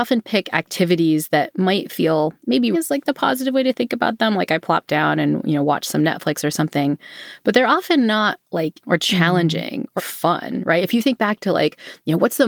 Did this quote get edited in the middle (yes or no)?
yes